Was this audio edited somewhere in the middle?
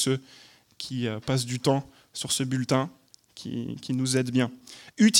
no; 0 cuts

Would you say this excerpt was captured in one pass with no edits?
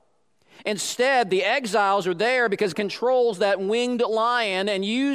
no; 1 cut; at 2.7 s

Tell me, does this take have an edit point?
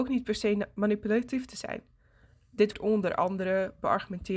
yes; 1 cut; at 2.7 s

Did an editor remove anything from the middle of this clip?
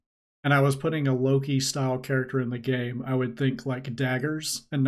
no; 0 cuts

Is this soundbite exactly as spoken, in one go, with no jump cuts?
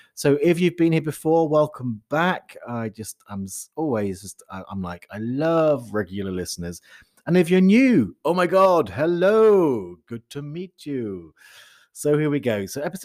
yes; 0 cuts

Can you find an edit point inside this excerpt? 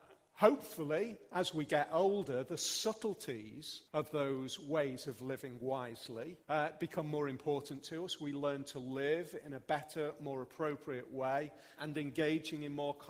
yes; 3 cuts; at 3.9 s, 6.4 s, 11.8 s

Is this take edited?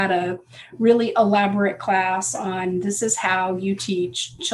no; 0 cuts

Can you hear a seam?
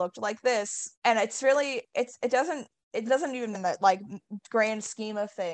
yes; 3 cuts; at 0.9 s, 3.0 s, 3.5 s

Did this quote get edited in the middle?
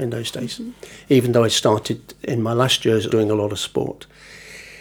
yes; 1 cut; at 3.1 s

